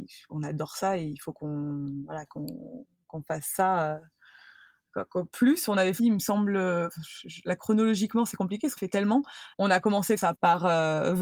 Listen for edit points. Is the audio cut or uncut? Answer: cut